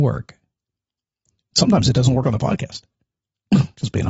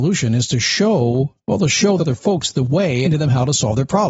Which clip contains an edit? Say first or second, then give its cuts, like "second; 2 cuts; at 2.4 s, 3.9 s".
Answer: second; 3 cuts; at 1.4 s, 2.0 s, 3.0 s